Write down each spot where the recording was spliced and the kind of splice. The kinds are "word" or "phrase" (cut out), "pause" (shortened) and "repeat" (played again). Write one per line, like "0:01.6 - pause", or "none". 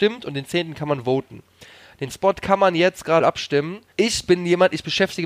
0:02.1 - word
0:03.2 - word
0:03.9 - word